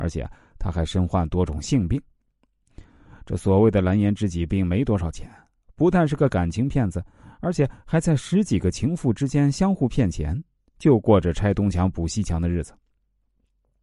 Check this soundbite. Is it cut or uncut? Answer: uncut